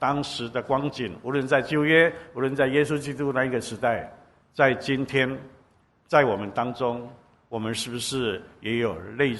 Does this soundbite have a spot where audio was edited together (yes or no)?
no